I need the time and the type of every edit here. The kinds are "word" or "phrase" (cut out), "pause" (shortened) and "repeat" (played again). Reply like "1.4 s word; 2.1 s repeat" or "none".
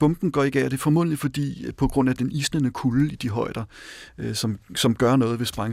none